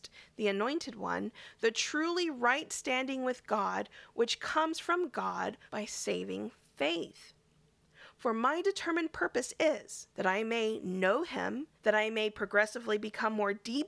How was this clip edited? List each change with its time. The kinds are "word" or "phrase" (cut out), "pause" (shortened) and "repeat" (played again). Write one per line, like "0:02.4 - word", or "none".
0:05.7 - pause
0:10.1 - pause
0:11.7 - pause